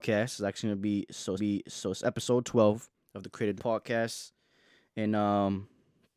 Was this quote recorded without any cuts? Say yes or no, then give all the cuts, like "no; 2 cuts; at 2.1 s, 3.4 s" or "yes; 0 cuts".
no; 2 cuts; at 1.4 s, 3.6 s